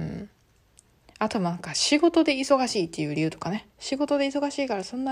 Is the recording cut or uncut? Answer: cut